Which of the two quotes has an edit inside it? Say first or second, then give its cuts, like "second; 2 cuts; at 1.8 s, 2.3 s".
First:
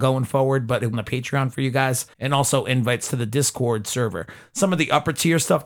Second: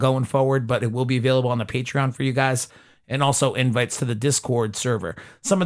first; 2 cuts; at 0.9 s, 2.1 s